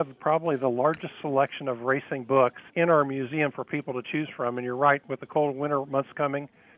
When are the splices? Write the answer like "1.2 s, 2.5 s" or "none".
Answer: 2.7 s